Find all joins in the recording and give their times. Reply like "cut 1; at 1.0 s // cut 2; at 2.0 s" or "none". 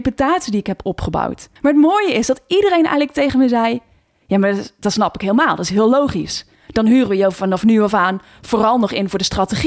cut 1; at 1.6 s // cut 2; at 6.6 s